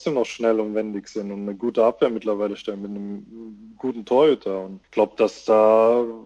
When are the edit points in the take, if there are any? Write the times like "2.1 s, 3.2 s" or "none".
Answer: 4.8 s